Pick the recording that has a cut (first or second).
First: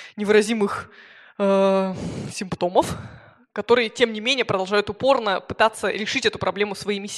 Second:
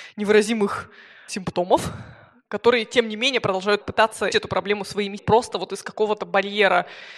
second